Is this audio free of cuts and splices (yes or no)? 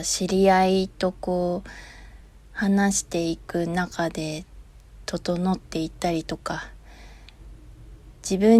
yes